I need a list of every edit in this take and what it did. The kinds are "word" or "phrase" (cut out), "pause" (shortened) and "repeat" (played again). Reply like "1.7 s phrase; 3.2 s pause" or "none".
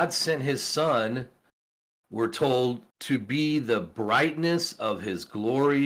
2.9 s pause